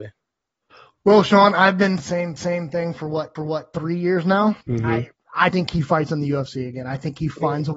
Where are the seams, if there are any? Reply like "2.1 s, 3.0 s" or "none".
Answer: 2.0 s, 2.4 s, 3.4 s, 4.6 s, 5.5 s